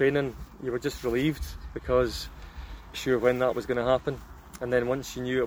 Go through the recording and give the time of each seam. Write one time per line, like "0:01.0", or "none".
0:02.9